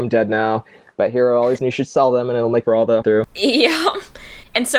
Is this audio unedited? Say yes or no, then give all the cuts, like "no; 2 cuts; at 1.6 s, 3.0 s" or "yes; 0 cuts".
no; 3 cuts; at 1.6 s, 2.6 s, 3.0 s